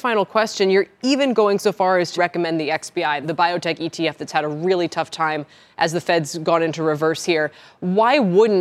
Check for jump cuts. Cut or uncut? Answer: cut